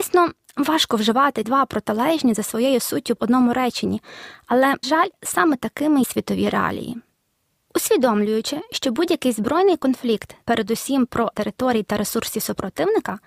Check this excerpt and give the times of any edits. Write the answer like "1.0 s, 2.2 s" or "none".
1.4 s, 3.2 s, 4.8 s, 6.0 s, 10.4 s, 11.3 s